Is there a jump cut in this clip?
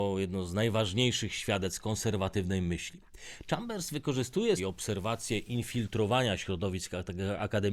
yes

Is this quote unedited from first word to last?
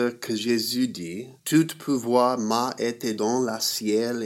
no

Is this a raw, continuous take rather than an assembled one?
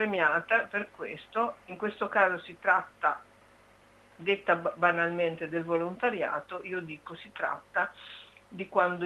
no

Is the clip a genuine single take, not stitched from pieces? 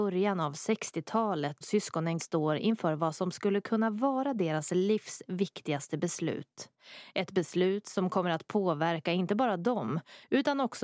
no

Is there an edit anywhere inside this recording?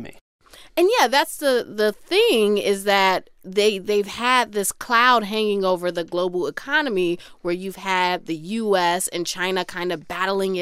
no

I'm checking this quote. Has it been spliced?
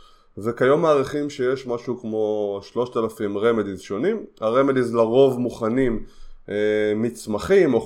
no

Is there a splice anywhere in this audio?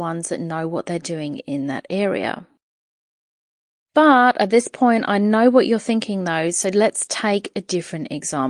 no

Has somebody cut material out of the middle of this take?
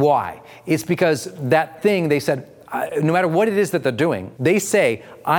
yes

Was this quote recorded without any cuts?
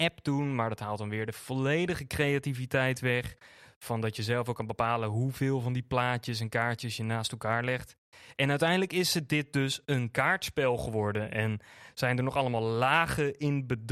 yes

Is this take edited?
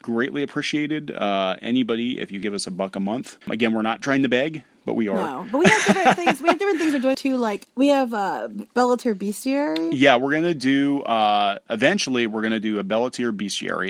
yes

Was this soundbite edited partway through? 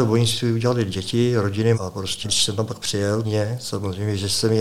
yes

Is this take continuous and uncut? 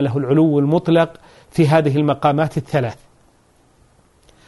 yes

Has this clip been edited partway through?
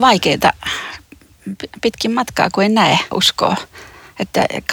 yes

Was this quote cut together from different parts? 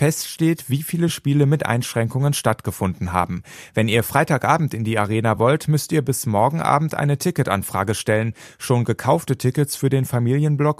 no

